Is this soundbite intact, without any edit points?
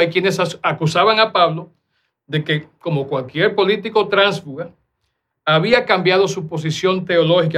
yes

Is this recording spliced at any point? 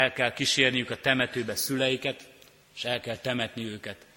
no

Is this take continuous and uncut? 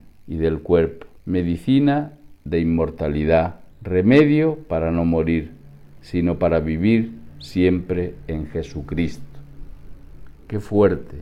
no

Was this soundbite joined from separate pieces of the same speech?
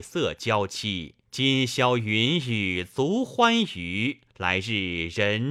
yes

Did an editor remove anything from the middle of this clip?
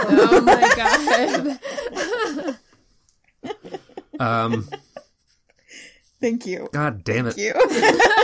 no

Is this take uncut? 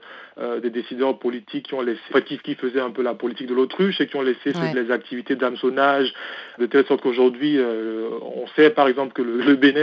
no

